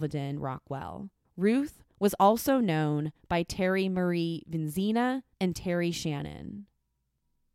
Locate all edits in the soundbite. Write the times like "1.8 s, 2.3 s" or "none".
1.2 s, 5.3 s